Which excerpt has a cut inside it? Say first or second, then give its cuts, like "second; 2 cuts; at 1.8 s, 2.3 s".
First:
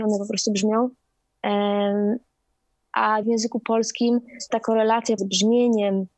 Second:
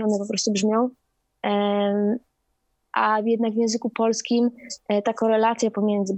first; 3 cuts; at 3.2 s, 4.5 s, 5.2 s